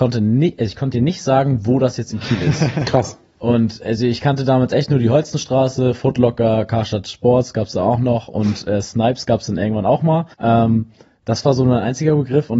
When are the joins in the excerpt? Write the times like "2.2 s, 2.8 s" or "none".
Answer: 10.3 s